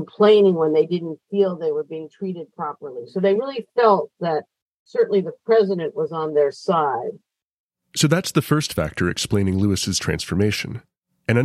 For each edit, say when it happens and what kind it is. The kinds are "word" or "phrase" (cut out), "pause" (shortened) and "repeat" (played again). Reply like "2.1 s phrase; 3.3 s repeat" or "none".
none